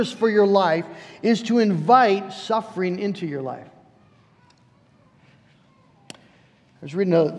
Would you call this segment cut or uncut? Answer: uncut